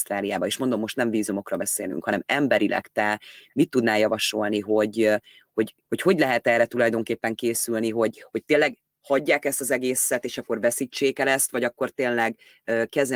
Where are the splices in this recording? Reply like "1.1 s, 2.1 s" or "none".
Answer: 5.8 s